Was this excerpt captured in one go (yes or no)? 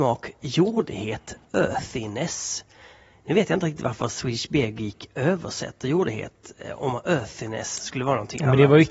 yes